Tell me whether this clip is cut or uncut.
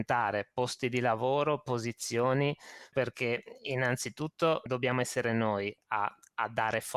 cut